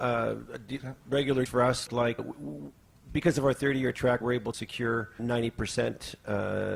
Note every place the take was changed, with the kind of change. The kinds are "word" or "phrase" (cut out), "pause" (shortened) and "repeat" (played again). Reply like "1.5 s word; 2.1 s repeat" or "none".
1.5 s word; 1.9 s word; 2.2 s word; 4.2 s word; 4.5 s word; 5.2 s word